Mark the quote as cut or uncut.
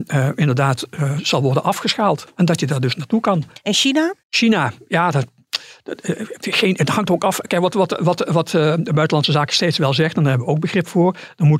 cut